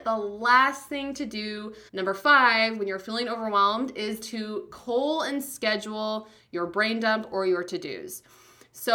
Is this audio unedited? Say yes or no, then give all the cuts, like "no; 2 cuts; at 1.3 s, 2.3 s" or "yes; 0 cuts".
no; 2 cuts; at 1.9 s, 4.2 s